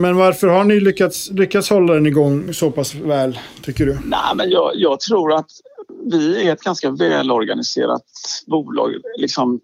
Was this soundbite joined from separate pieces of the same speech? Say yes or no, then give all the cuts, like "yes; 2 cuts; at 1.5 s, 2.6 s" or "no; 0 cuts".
no; 0 cuts